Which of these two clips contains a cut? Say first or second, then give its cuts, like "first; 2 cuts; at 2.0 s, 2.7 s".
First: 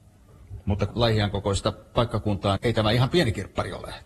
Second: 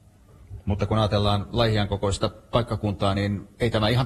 first; 2 cuts; at 0.9 s, 2.6 s